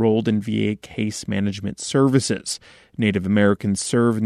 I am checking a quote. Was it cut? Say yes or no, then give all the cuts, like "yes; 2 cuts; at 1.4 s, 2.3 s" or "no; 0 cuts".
no; 0 cuts